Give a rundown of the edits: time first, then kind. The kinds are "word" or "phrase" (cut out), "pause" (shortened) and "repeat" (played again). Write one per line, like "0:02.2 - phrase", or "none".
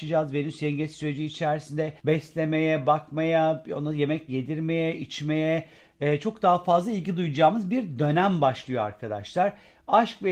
0:02.0 - pause
0:04.3 - word